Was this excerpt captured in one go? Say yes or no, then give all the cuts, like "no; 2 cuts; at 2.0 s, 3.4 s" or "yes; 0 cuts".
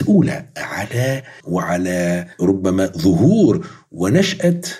no; 2 cuts; at 1.4 s, 2.3 s